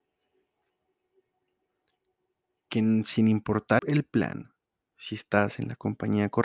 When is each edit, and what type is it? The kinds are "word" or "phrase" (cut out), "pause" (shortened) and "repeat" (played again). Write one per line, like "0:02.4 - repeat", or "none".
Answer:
0:03.8 - word